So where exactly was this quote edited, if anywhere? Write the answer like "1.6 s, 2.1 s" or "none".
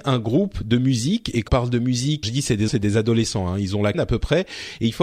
1.5 s, 2.2 s, 2.7 s, 3.9 s